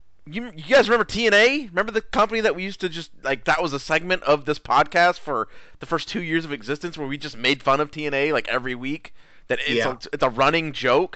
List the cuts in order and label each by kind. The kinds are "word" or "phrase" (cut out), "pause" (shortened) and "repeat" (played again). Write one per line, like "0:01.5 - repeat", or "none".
none